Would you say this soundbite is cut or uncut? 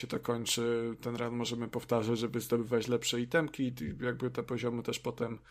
uncut